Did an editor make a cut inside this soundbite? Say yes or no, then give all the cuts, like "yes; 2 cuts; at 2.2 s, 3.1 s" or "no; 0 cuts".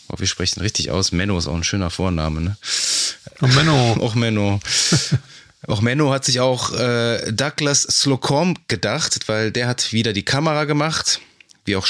no; 0 cuts